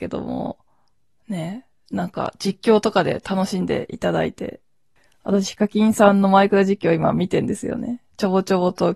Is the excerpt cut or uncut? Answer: uncut